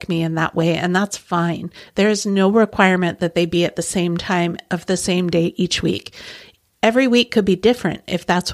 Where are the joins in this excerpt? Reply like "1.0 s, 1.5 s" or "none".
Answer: none